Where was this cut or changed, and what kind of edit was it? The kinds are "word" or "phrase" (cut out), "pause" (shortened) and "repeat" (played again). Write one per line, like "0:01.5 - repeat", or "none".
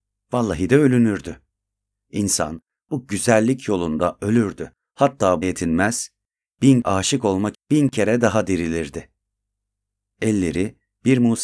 0:05.4 - word
0:06.8 - word
0:07.5 - word